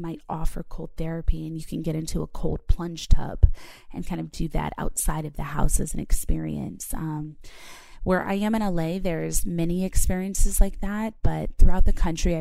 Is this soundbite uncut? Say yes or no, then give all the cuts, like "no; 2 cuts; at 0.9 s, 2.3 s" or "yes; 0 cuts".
yes; 0 cuts